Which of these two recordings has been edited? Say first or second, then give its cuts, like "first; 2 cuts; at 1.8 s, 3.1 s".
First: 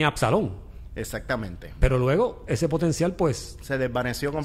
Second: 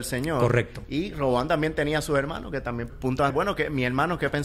second; 2 cuts; at 2.9 s, 3.3 s